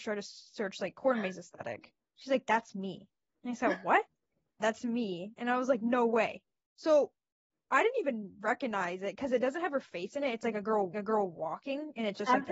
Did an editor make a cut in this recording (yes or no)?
yes